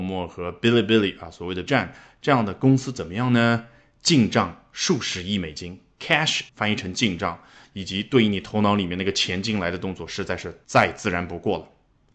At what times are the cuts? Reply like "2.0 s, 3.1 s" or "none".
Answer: 1.7 s, 6.5 s